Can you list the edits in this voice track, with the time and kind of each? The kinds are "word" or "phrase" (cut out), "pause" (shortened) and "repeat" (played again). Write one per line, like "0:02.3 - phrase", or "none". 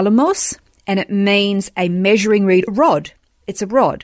0:02.7 - word